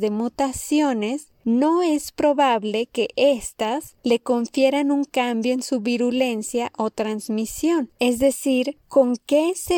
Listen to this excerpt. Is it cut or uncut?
cut